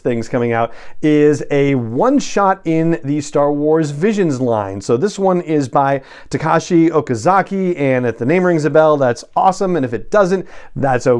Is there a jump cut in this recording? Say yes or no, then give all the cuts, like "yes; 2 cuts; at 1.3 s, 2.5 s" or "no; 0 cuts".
no; 0 cuts